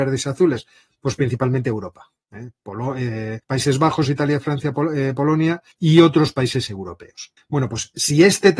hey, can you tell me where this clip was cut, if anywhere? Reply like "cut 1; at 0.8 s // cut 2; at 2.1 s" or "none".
cut 1; at 3.4 s // cut 2; at 5.7 s // cut 3; at 7.4 s